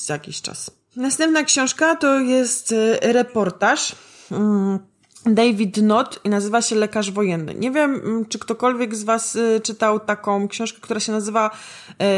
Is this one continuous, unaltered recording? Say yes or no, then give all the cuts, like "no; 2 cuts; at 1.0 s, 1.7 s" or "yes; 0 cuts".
yes; 0 cuts